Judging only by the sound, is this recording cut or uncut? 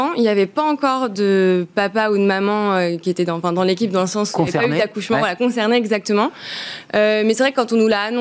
uncut